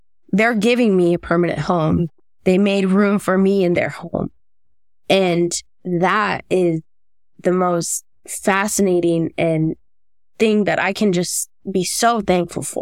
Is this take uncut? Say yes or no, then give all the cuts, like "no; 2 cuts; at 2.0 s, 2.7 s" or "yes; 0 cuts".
yes; 0 cuts